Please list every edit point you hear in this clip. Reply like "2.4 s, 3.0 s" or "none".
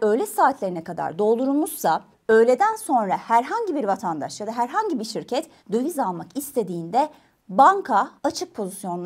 2.1 s, 5.6 s, 8.2 s

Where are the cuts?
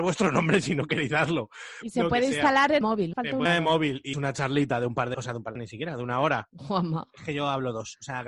2.8 s, 3.1 s, 3.5 s, 4.1 s, 5.1 s, 5.6 s

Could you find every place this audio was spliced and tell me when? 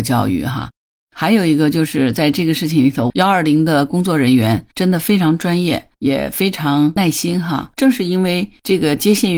4.7 s, 5.9 s, 7.7 s

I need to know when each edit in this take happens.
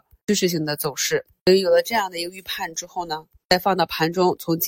none

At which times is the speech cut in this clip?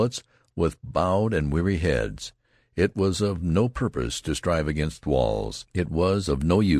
none

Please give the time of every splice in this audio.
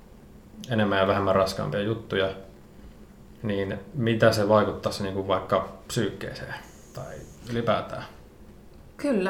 none

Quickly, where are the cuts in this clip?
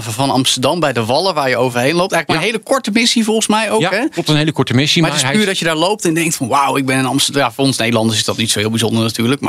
none

